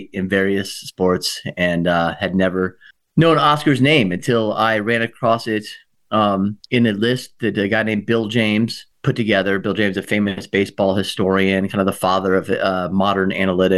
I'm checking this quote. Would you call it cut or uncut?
cut